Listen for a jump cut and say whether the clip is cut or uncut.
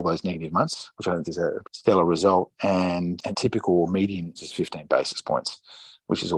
cut